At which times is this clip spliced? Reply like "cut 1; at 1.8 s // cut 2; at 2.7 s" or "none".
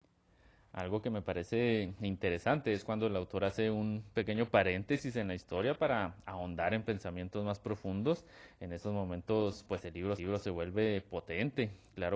cut 1; at 10.2 s